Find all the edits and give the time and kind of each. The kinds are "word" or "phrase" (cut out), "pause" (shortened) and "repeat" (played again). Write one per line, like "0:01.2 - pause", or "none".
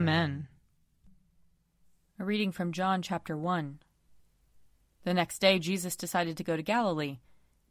none

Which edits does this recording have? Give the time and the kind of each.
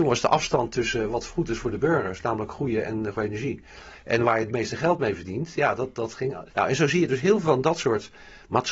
0:03.1 - word
0:06.5 - pause

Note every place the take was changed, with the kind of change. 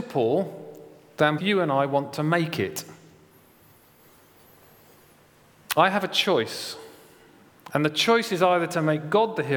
0:01.4 - word

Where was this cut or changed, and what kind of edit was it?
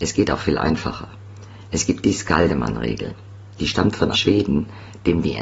0:04.1 - word

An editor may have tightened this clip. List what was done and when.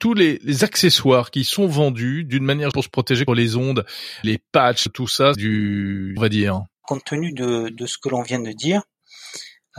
0:02.7 - word
0:03.3 - word
0:04.2 - phrase
0:04.9 - phrase
0:05.3 - word
0:06.2 - phrase
0:06.7 - pause

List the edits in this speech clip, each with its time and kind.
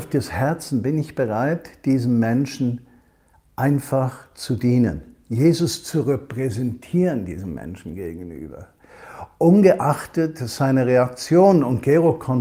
none

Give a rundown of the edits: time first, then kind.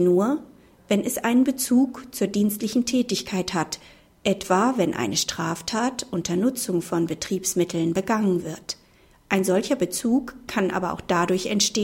none

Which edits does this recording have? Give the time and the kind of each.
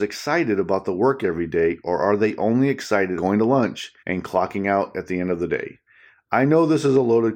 0:03.2 - word
0:04.0 - pause

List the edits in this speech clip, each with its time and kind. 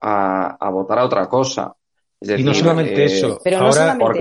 none

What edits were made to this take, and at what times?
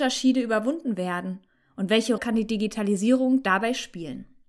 0:02.2 - word

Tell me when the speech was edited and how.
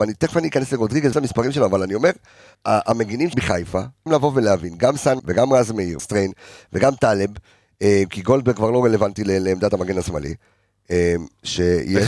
0:01.1 - word
0:02.5 - word
0:03.3 - word
0:04.1 - word
0:05.2 - word
0:06.0 - word

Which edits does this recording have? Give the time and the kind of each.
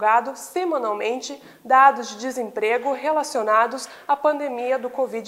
none

